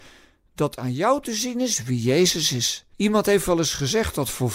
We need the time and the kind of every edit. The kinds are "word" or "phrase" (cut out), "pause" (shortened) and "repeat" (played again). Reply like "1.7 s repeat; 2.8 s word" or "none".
2.9 s pause